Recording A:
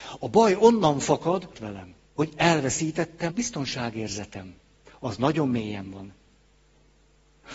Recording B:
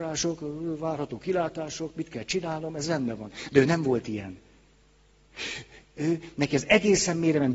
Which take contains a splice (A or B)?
A